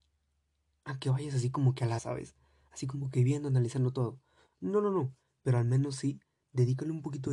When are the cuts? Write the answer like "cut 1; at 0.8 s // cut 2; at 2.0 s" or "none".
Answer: cut 1; at 2.0 s